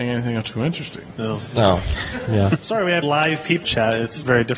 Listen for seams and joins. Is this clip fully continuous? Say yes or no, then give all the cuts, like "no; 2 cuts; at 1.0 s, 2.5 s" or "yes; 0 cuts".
no; 2 cuts; at 3.0 s, 3.6 s